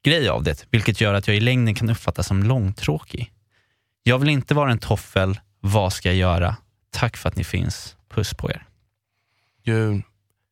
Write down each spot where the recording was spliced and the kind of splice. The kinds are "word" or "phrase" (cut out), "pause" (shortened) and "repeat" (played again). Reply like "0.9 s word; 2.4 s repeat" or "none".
none